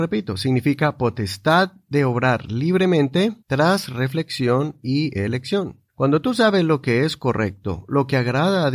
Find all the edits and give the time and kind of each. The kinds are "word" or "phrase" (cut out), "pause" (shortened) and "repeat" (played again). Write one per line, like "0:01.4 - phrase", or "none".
0:03.4 - pause
0:05.9 - pause